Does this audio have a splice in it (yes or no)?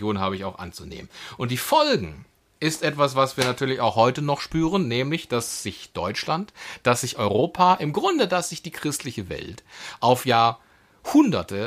no